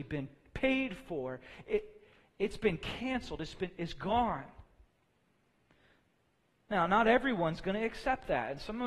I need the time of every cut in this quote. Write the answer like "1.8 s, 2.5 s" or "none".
none